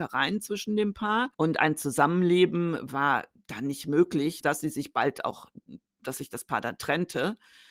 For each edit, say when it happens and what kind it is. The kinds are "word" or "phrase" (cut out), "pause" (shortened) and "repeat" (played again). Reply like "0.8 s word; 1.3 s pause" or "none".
1.3 s pause; 4.4 s word